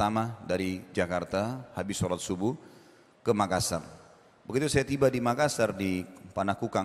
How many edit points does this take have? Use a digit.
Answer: 0